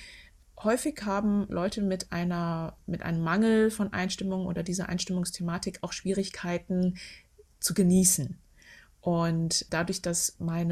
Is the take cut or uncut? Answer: uncut